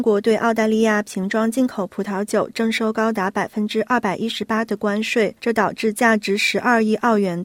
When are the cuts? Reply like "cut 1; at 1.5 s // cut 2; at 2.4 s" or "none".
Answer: cut 1; at 5.4 s